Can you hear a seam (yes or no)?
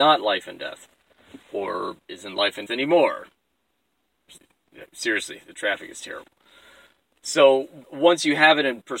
yes